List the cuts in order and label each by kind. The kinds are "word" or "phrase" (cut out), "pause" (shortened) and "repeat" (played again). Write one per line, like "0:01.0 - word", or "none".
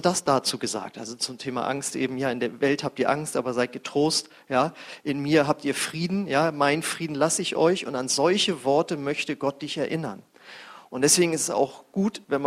none